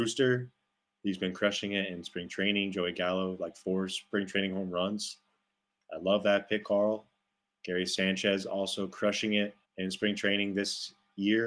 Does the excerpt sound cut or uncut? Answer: cut